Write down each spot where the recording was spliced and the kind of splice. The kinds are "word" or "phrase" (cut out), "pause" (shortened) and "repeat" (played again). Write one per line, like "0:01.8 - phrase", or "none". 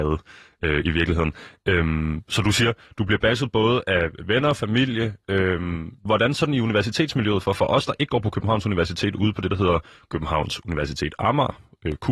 0:06.0 - pause

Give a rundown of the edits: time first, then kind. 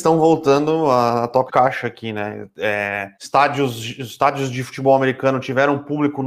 0:01.5 - word
0:03.1 - pause

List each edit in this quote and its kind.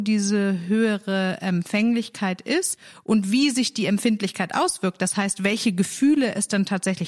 none

